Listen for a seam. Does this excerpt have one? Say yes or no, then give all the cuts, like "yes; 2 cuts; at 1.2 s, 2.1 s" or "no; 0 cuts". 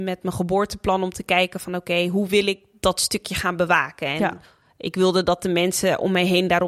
no; 0 cuts